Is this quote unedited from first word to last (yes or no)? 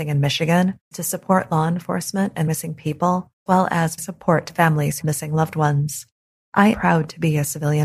no